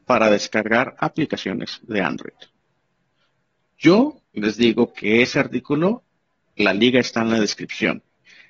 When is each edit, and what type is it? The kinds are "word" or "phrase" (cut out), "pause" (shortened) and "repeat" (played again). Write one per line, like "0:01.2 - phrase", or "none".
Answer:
0:04.2 - pause